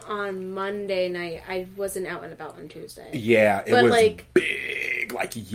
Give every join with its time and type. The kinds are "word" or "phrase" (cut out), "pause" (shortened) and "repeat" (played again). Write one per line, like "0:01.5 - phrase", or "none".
none